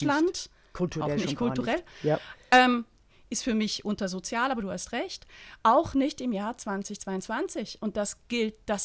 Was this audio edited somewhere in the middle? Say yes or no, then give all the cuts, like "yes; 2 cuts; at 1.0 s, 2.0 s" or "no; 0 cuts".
no; 0 cuts